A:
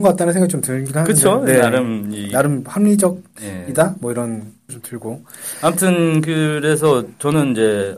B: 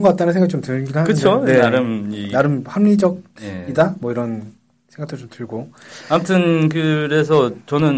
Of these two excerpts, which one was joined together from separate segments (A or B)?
A